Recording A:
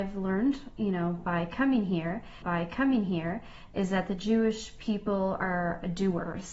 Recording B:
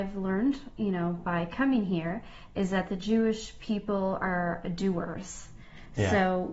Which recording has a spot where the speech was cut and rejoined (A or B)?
A